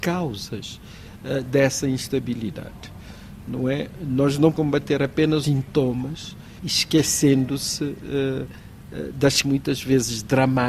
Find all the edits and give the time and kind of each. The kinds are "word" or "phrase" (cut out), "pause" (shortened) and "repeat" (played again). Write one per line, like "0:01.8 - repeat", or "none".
0:04.5 - word
0:05.4 - word
0:09.4 - word